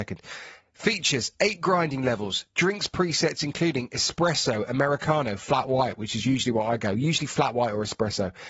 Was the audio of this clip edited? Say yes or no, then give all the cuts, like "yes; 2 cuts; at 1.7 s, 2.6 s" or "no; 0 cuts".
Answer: no; 0 cuts